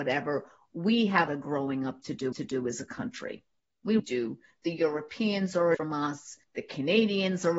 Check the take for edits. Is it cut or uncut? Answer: cut